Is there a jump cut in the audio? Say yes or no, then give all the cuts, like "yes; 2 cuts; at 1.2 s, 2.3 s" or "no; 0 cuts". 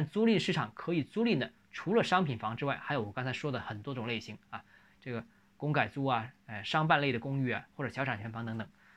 no; 0 cuts